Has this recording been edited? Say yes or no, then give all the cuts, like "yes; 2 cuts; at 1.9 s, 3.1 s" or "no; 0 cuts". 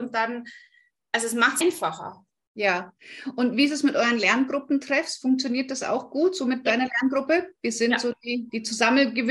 yes; 1 cut; at 1.6 s